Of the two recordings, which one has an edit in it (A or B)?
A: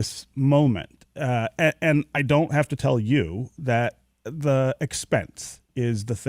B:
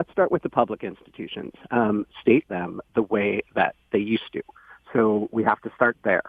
B